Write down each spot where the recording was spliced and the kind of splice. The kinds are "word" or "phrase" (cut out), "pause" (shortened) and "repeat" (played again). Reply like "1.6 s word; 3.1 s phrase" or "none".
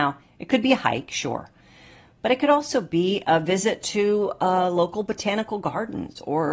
none

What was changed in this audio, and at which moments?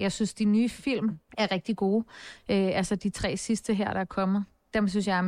1.3 s pause

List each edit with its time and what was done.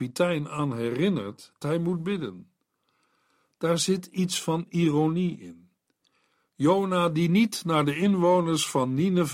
1.6 s phrase

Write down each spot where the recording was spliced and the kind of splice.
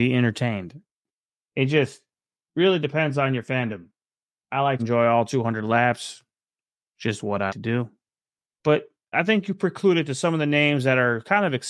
4.8 s word; 7.5 s word; 9.1 s word

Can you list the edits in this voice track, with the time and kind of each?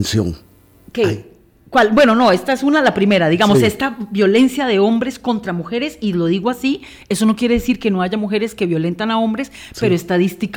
none

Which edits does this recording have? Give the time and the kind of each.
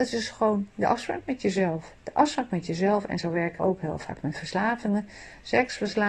2.0 s pause; 3.6 s word

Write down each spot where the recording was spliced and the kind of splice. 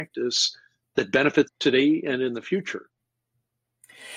1.5 s word

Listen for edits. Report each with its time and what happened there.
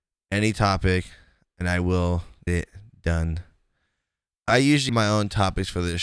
2.5 s word; 4.5 s word; 4.9 s word

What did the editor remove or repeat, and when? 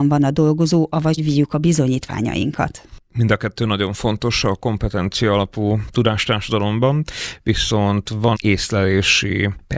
1.2 s phrase; 8.3 s word

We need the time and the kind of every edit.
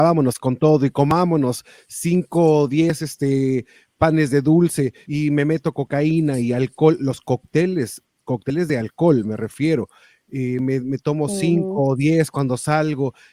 none

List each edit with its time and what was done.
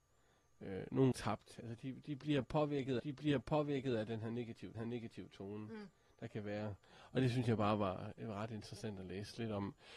1.1 s word; 3.0 s repeat; 4.7 s repeat

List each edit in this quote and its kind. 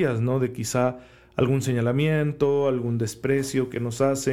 none

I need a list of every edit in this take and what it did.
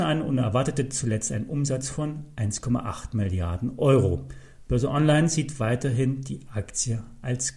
none

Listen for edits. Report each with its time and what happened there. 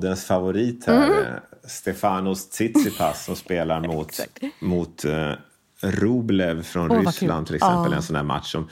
none

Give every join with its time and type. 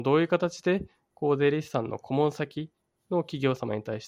none

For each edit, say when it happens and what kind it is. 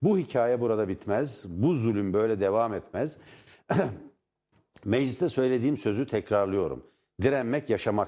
none

